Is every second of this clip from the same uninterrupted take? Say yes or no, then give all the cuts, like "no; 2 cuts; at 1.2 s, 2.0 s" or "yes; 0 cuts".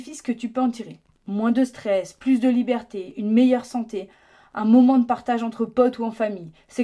yes; 0 cuts